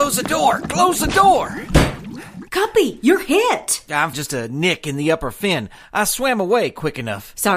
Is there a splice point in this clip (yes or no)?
yes